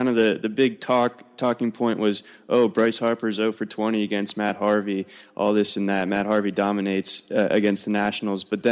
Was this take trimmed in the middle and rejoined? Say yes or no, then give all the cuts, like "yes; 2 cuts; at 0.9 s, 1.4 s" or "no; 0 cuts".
no; 0 cuts